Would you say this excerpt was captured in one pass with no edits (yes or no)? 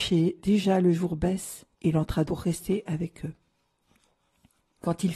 no